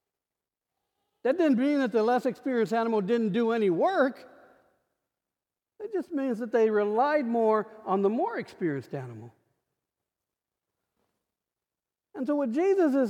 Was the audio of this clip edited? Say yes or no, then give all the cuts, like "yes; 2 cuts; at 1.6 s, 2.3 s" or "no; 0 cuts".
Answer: no; 0 cuts